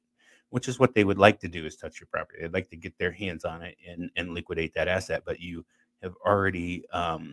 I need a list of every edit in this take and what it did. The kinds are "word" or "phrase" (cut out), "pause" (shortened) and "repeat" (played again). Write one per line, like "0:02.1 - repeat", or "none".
none